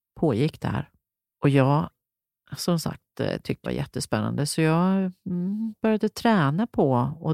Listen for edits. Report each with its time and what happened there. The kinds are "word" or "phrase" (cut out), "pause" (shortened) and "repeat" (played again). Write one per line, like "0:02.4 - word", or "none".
0:03.6 - phrase